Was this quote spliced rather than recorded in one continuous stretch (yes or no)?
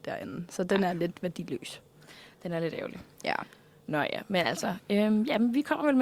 no